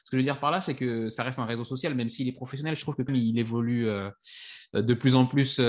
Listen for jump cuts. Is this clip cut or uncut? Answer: cut